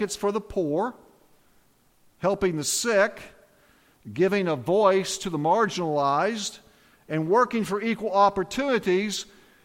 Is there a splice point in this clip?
no; 0 cuts

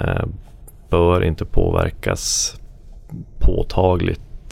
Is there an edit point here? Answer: no; 0 cuts

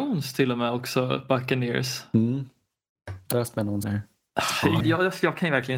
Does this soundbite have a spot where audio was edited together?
yes; 3 cuts; at 3.3 s, 3.8 s, 4.8 s

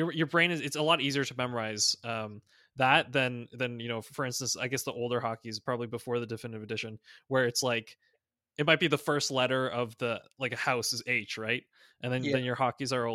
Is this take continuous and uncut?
yes; 0 cuts

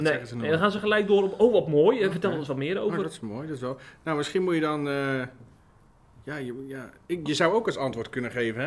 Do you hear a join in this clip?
no; 0 cuts

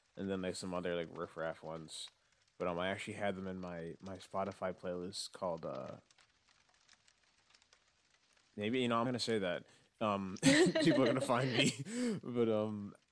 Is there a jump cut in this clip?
yes; 1 cut; at 9.1 s

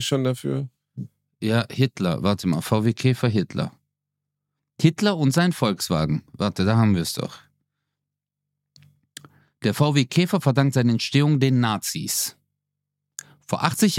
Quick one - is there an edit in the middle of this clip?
no; 0 cuts

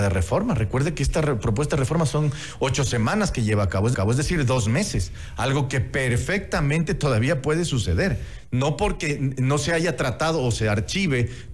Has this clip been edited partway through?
yes; 1 cut; at 3.9 s

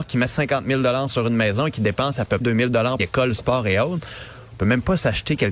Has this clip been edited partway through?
yes; 2 cuts; at 2.4 s, 3.0 s

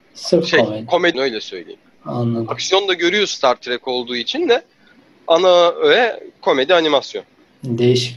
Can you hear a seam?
yes; 2 cuts; at 1.1 s, 3.3 s

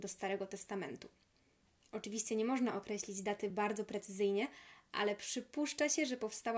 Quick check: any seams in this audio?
no; 0 cuts

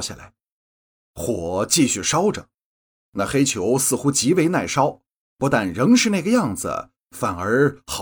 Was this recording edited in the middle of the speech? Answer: no; 0 cuts

